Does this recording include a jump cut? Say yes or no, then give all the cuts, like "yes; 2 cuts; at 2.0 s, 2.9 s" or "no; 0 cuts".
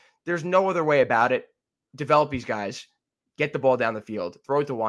no; 0 cuts